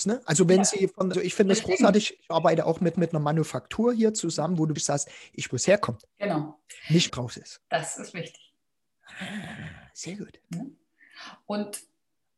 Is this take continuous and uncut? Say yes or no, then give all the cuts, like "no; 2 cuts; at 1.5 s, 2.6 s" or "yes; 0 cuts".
no; 8 cuts; at 1.1 s, 2.9 s, 4.8 s, 5.5 s, 6.1 s, 7.1 s, 7.6 s, 10.5 s